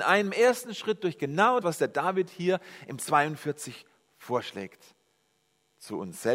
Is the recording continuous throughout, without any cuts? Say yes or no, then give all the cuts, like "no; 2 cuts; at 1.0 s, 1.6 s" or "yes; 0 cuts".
no; 2 cuts; at 1.6 s, 3.0 s